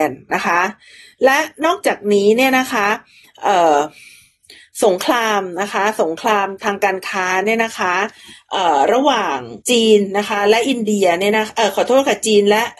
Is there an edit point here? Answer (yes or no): yes